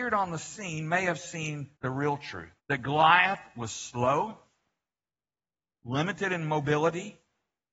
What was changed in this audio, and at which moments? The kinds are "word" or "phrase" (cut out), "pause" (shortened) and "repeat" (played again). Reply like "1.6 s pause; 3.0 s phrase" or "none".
1.8 s pause; 2.6 s pause